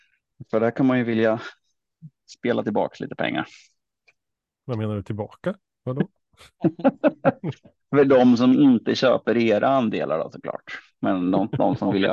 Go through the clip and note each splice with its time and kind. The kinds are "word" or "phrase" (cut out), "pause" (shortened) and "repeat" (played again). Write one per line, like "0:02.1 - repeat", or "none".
none